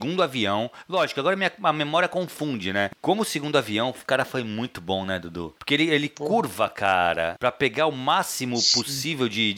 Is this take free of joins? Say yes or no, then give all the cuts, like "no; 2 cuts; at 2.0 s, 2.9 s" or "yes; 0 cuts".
no; 1 cut; at 5.6 s